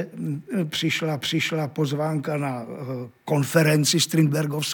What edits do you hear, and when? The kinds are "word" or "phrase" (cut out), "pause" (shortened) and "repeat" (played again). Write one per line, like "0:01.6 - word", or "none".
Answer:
0:01.2 - repeat